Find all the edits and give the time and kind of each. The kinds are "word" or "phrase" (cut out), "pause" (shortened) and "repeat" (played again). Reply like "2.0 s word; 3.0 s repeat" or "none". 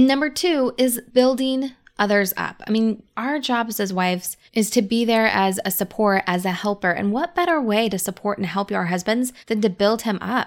4.5 s pause; 9.4 s pause